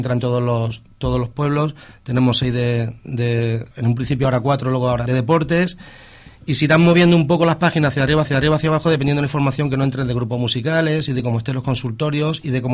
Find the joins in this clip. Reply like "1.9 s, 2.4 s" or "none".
3.7 s, 5.1 s, 8.2 s